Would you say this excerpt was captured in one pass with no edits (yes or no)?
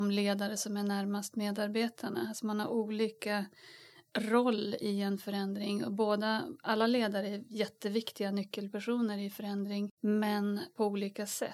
yes